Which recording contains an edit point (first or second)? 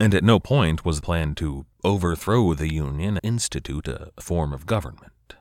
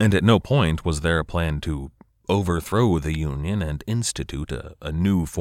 first